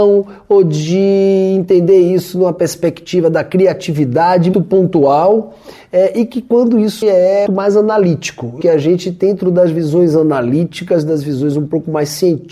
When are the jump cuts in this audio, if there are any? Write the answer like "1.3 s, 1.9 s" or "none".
4.5 s, 7.0 s, 7.5 s, 8.6 s